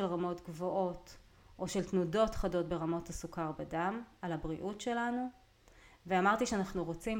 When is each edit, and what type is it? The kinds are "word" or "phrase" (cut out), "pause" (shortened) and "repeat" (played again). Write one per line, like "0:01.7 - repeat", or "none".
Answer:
none